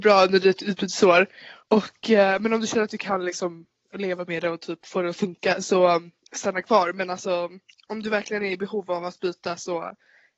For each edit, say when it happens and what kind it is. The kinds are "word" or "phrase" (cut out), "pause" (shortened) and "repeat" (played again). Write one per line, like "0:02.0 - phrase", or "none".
0:01.6 - pause